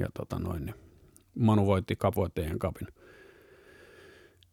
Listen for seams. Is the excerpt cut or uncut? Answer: uncut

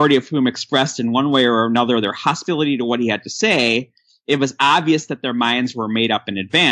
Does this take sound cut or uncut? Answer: uncut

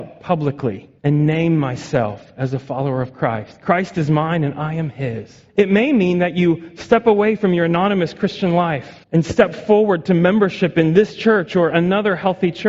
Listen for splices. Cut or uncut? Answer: cut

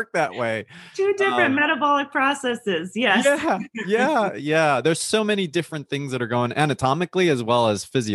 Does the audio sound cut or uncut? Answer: uncut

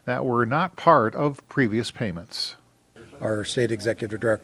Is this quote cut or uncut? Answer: uncut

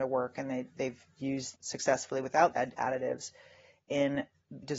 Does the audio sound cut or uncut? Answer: cut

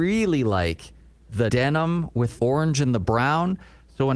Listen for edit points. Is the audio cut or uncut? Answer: cut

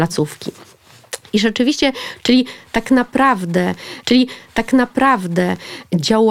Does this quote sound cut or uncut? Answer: cut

